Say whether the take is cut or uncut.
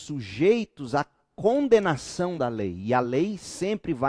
uncut